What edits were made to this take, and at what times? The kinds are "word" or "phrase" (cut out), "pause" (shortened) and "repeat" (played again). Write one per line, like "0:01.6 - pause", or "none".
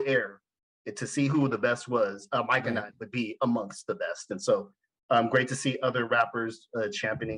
none